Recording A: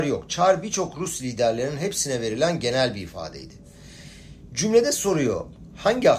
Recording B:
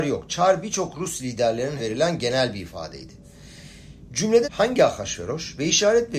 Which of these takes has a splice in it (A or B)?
B